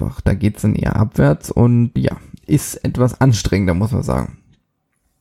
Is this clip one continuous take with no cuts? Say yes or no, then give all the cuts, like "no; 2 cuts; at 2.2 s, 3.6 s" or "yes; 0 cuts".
no; 1 cut; at 2.0 s